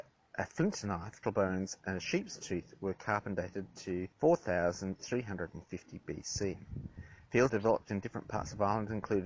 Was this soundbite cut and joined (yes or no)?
yes